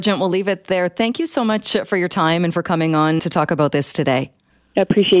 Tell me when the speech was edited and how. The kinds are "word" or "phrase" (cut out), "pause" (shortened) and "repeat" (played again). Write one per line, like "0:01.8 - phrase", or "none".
0:03.2 - word